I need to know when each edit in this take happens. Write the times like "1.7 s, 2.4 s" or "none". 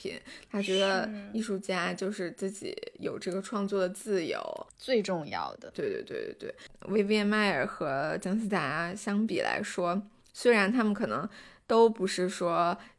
none